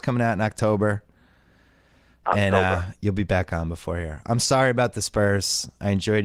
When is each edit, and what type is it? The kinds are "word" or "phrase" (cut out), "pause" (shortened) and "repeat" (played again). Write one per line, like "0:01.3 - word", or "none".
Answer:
none